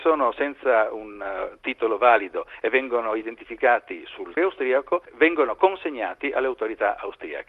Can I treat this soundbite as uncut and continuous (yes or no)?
no